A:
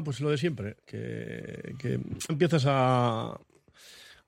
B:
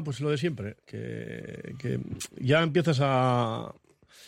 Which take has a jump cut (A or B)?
A